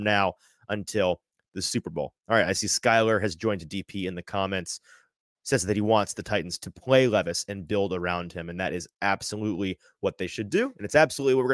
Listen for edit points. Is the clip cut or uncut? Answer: uncut